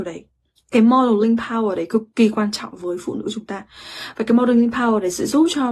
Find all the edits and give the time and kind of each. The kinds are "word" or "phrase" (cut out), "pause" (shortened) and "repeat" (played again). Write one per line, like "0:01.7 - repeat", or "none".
none